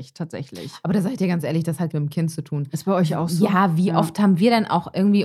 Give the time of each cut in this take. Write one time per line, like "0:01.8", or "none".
0:01.9